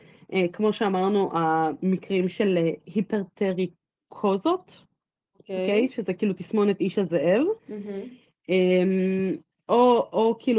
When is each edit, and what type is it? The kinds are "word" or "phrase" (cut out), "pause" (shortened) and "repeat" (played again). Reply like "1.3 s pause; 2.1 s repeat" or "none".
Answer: 7.6 s pause